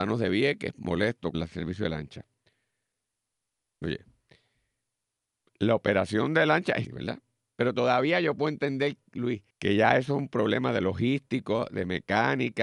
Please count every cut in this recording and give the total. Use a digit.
3